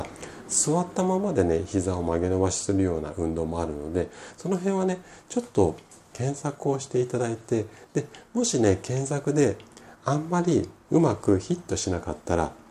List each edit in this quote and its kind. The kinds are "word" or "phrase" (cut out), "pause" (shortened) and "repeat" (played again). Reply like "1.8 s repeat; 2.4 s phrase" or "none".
none